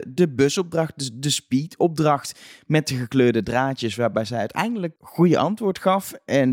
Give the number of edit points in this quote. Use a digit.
1